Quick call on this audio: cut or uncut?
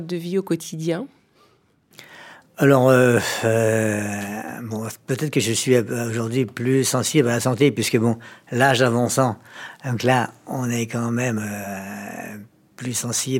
uncut